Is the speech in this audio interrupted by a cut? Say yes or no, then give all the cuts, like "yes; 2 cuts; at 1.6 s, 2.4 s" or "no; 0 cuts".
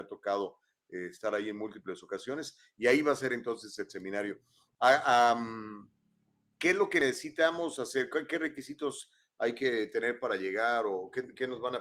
no; 0 cuts